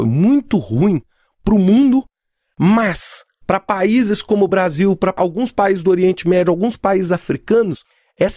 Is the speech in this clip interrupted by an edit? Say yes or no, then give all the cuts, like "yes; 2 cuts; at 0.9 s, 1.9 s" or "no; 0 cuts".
no; 0 cuts